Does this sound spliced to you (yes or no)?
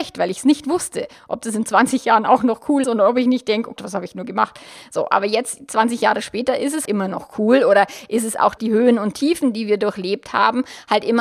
yes